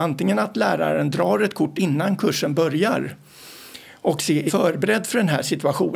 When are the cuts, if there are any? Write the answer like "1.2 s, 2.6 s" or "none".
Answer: 1.8 s, 4.5 s